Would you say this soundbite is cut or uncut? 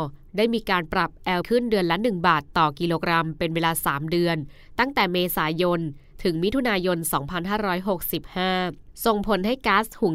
cut